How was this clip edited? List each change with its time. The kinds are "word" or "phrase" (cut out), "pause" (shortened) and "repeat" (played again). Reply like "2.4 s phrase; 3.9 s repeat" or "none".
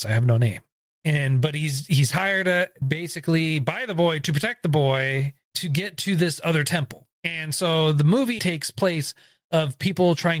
2.8 s word; 5.4 s pause; 7.1 s pause; 8.4 s word